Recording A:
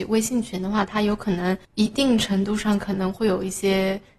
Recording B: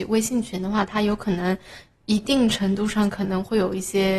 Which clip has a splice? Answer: A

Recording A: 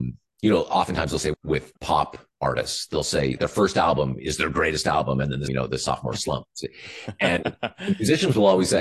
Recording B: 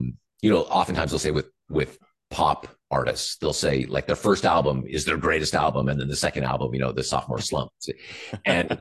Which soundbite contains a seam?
A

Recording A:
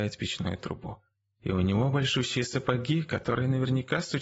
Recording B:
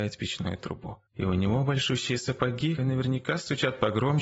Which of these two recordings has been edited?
B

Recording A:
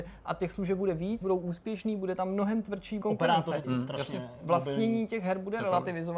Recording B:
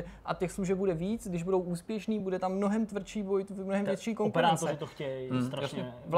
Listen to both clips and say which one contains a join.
A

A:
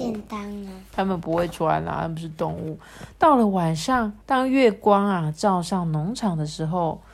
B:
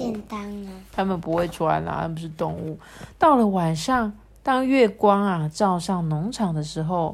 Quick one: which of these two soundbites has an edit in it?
A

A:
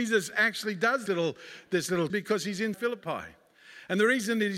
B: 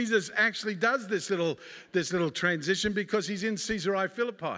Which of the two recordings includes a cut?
A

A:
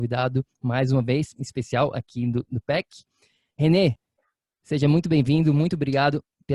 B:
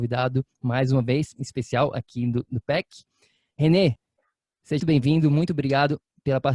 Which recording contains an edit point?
B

